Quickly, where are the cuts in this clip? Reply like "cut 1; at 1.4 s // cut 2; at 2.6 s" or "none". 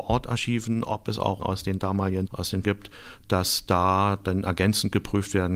cut 1; at 1.4 s // cut 2; at 2.3 s // cut 3; at 2.6 s